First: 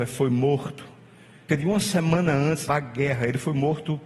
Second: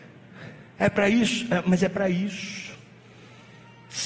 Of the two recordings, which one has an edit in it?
first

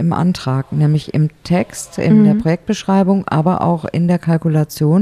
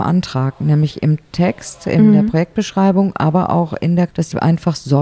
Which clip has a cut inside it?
second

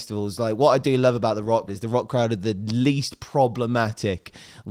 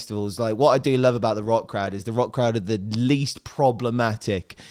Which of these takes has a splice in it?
first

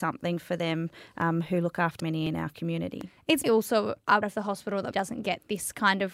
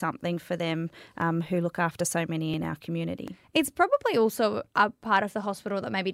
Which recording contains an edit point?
first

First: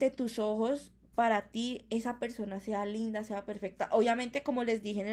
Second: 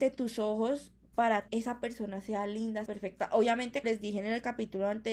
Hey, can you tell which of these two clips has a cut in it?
second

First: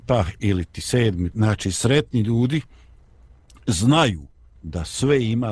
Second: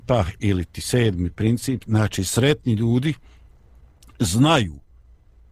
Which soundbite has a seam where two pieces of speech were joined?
first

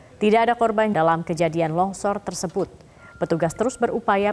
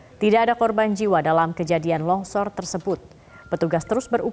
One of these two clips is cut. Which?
first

